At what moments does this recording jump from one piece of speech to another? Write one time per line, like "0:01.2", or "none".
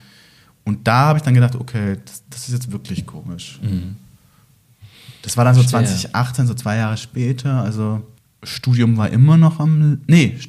0:08.2